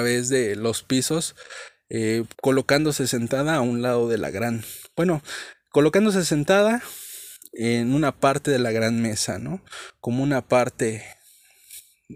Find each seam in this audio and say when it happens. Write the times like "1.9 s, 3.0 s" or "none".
2.3 s